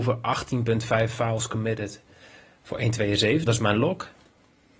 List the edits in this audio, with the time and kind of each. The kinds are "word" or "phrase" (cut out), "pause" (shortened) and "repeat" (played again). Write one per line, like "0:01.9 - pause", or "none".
0:03.5 - word